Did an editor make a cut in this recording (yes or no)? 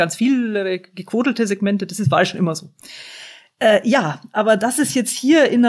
no